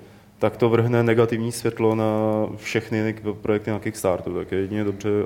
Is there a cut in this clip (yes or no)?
no